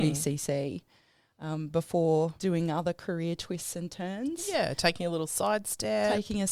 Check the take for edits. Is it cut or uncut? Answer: cut